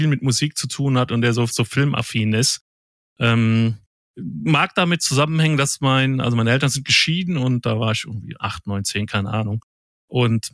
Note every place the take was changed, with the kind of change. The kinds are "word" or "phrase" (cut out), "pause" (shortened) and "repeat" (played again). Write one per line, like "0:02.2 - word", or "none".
none